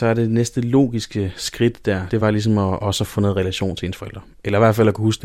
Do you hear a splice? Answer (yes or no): no